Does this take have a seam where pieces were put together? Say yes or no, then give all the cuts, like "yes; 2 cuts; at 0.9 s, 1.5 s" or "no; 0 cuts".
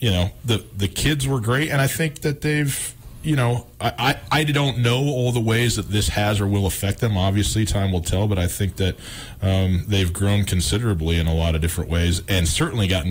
no; 0 cuts